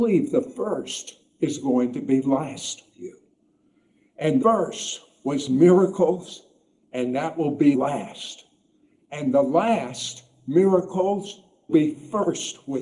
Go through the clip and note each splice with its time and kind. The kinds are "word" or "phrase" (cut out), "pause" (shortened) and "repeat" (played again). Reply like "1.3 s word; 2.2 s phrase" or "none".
2.9 s word; 4.4 s word; 7.7 s word; 11.7 s word